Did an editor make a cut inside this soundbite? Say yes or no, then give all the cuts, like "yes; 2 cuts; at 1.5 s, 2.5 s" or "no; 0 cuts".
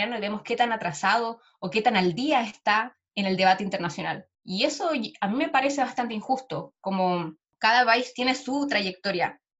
no; 0 cuts